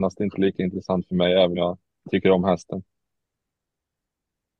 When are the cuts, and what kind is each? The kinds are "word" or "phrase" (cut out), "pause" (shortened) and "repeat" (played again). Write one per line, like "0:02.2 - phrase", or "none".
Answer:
0:01.6 - word